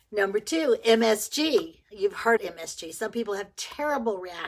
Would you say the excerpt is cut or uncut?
cut